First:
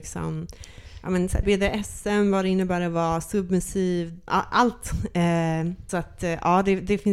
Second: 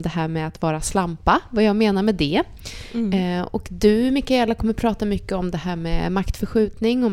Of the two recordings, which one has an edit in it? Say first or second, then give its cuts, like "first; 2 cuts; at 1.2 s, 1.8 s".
first; 3 cuts; at 1.4 s, 4.3 s, 5.9 s